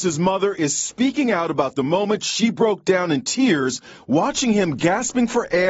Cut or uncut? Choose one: uncut